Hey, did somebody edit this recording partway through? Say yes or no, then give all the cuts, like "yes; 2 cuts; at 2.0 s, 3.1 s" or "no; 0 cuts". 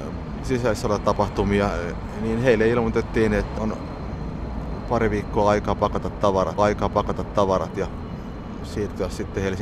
yes; 2 cuts; at 3.6 s, 6.6 s